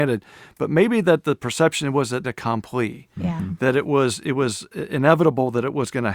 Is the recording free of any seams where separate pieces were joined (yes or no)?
no